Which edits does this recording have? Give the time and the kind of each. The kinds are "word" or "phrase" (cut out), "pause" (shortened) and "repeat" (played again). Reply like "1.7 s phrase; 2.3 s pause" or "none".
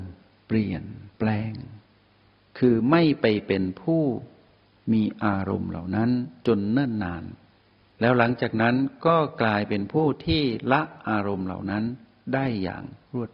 7.6 s pause